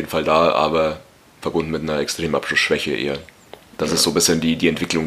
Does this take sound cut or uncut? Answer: uncut